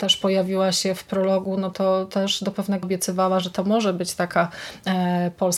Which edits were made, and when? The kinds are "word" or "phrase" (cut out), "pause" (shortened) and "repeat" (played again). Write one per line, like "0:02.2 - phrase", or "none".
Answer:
0:02.8 - word